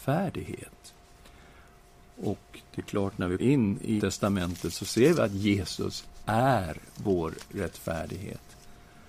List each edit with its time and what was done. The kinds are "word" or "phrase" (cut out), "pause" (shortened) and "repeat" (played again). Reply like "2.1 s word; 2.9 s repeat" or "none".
3.4 s word; 4.0 s word